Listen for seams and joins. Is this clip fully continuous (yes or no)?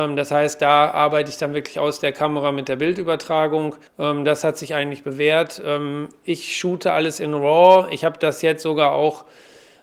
no